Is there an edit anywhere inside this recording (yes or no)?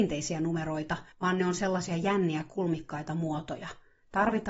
yes